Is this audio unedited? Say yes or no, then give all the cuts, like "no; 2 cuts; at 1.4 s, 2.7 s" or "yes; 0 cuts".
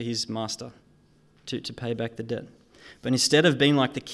yes; 0 cuts